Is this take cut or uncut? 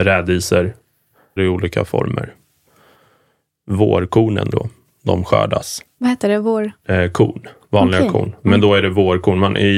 cut